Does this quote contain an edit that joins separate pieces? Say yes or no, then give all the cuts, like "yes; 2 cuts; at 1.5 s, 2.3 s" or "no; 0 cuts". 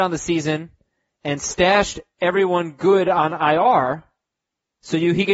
no; 0 cuts